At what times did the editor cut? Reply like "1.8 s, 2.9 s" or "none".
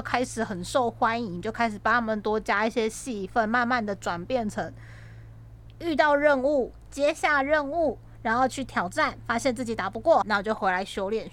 10.2 s